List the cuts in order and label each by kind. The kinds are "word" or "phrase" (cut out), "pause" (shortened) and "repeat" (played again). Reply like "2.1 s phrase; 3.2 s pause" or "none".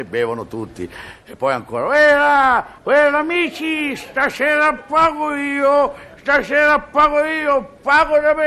2.8 s pause

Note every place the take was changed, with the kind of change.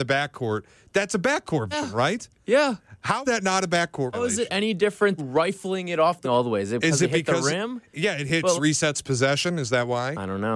1.7 s word; 3.2 s word; 4.1 s word; 5.2 s phrase; 6.2 s phrase; 8.6 s phrase

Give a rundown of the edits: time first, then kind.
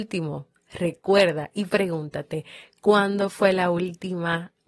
none

